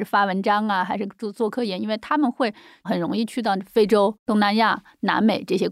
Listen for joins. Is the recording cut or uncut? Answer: uncut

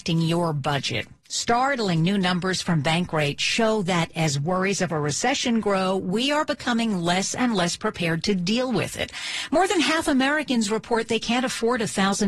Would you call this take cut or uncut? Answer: uncut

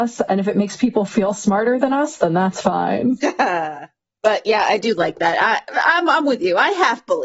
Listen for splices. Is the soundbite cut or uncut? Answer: uncut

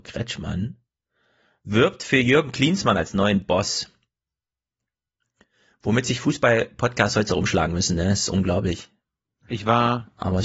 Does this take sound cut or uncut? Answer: uncut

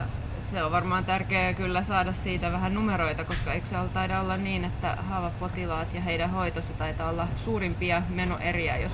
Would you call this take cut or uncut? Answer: uncut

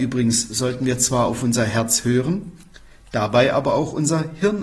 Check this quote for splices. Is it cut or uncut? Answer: uncut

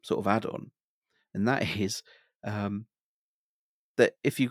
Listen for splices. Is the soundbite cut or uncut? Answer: uncut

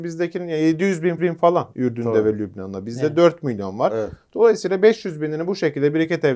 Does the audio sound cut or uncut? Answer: cut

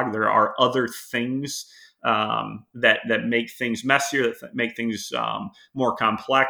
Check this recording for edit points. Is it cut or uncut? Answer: uncut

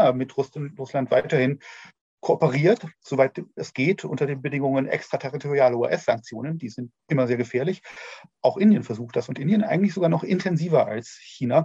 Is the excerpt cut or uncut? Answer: uncut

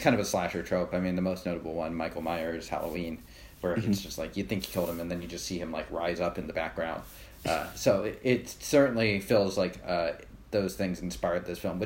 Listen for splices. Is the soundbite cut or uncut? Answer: uncut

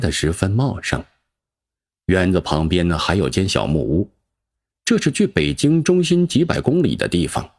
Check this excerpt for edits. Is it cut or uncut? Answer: uncut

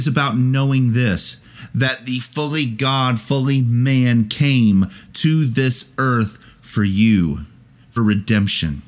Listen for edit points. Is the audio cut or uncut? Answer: cut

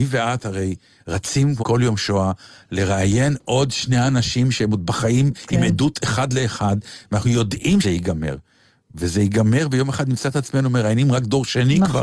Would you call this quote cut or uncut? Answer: cut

